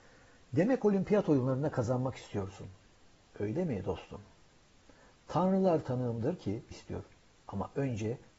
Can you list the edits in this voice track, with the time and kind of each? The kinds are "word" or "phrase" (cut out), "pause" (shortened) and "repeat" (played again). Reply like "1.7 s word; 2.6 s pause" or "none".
6.7 s phrase

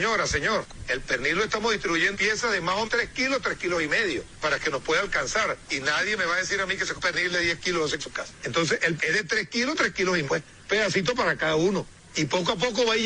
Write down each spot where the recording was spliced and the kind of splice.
2.1 s word; 2.9 s word; 7.0 s word; 8.0 s word; 9.0 s word; 10.3 s word

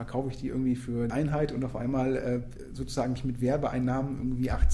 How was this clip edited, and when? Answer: 1.1 s phrase; 3.2 s word

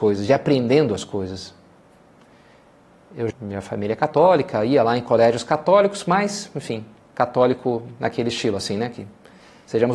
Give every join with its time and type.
3.3 s word

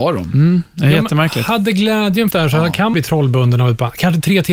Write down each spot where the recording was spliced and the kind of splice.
2.3 s word; 2.9 s word

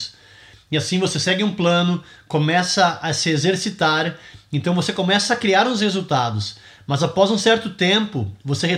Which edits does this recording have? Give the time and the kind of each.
none

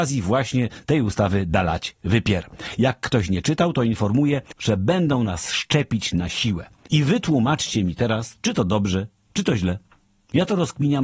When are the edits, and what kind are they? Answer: none

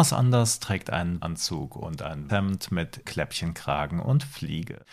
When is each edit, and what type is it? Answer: 1.2 s phrase; 2.3 s word; 3.0 s word

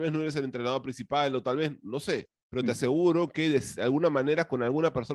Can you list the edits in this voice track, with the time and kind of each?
2.4 s pause

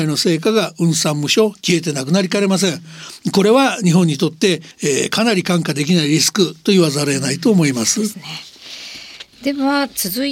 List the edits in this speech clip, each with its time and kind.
4.7 s pause

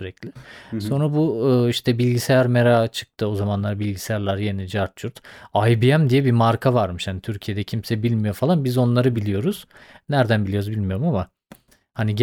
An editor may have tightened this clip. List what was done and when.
none

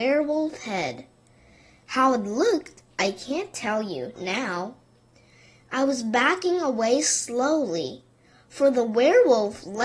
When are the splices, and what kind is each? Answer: 4.1 s word

